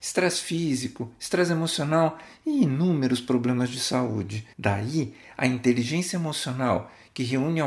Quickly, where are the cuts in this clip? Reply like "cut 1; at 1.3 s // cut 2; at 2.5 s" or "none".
cut 1; at 4.5 s